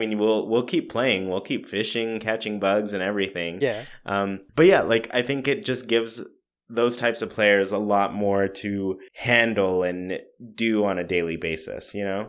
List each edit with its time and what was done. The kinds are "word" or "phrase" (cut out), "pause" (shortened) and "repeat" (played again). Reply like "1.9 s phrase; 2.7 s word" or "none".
4.5 s pause; 9.1 s pause